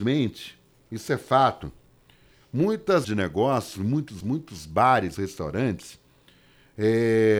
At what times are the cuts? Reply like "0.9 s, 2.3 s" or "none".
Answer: 3.0 s, 4.2 s, 5.2 s

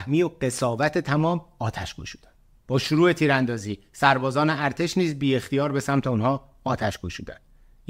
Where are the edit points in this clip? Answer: 2.6 s

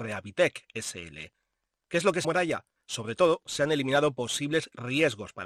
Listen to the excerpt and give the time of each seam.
2.2 s

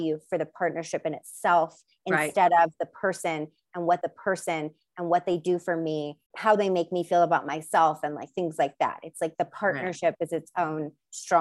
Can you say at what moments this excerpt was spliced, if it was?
4.0 s, 6.3 s

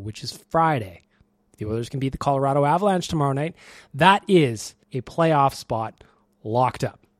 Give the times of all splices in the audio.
4.8 s

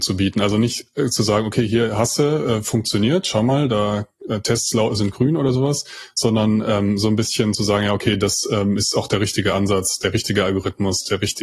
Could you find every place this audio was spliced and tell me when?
none

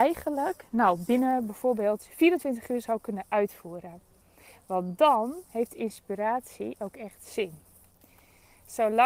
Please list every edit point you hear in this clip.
none

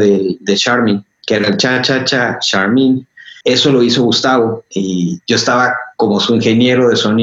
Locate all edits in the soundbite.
3.4 s

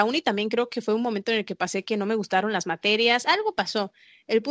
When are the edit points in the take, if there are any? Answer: none

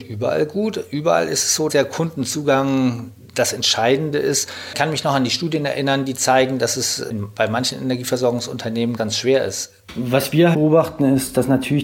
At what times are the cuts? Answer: 1.7 s, 9.0 s, 10.5 s

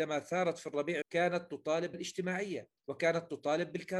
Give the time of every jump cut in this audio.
1.0 s, 1.9 s, 2.8 s

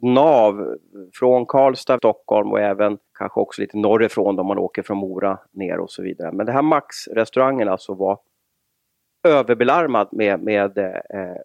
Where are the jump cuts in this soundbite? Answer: 2.0 s, 3.1 s

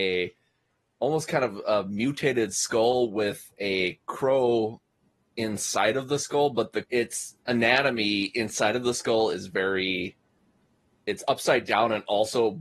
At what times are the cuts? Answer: 6.8 s

